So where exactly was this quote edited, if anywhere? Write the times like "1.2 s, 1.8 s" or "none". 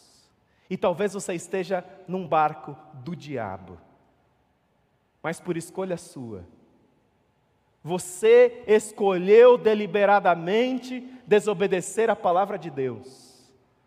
none